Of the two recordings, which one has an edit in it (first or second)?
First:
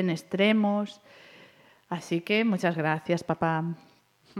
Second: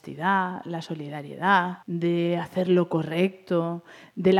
second